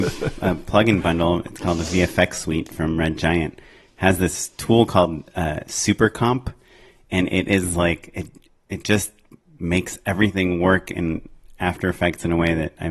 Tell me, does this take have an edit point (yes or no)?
no